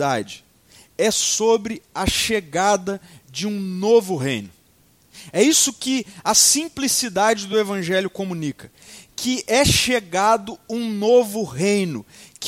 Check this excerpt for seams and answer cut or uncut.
uncut